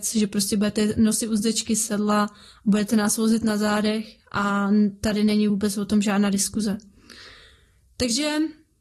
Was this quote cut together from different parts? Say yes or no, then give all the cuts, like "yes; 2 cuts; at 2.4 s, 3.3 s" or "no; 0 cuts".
no; 0 cuts